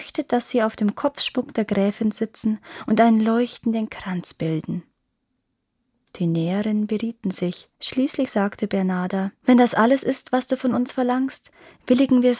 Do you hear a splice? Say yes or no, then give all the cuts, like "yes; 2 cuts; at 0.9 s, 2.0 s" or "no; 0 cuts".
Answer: yes; 2 cuts; at 7.7 s, 9.4 s